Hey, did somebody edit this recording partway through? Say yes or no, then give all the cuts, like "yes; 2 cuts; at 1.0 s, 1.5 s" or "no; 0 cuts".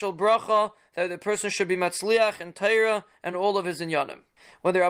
no; 0 cuts